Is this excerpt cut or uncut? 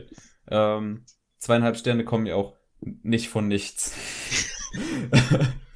uncut